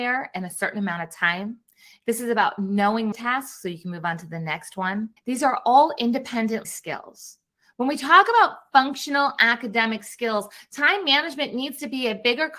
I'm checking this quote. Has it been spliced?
yes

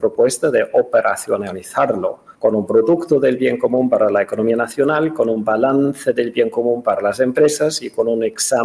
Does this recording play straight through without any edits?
no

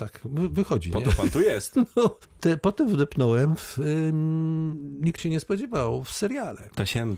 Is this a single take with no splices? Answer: no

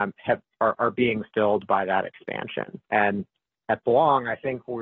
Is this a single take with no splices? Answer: no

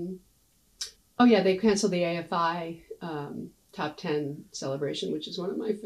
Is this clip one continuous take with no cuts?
no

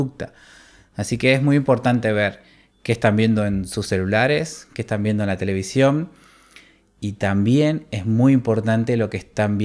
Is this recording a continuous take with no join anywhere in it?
yes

